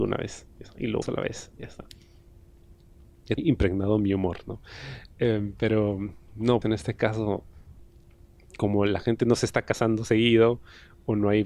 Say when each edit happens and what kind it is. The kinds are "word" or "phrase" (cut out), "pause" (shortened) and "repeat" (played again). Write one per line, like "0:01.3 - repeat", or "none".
0:01.0 - phrase
0:03.4 - word
0:06.6 - word